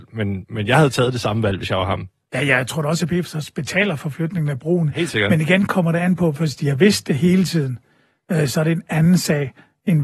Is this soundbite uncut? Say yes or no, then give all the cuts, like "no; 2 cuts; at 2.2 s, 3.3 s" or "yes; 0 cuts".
yes; 0 cuts